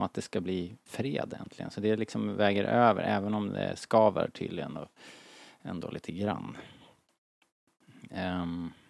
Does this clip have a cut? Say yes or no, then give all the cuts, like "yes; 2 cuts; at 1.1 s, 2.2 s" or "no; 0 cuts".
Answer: no; 0 cuts